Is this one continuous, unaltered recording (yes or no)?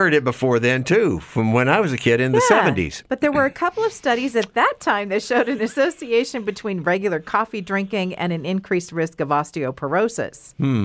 yes